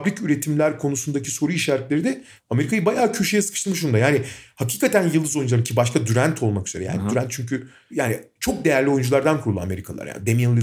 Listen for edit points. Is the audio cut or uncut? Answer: uncut